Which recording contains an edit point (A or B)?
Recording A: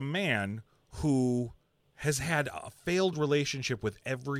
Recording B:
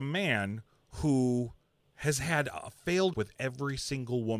B